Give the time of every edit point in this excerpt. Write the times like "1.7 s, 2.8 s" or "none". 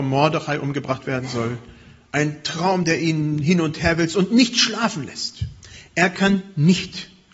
none